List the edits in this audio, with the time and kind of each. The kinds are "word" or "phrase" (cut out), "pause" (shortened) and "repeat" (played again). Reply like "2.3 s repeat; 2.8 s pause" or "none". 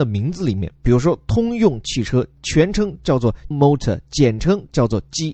3.5 s word